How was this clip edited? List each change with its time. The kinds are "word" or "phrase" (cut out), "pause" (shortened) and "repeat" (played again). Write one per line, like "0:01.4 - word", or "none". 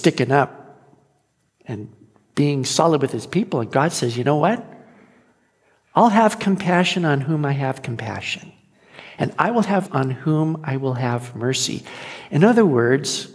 0:09.8 - word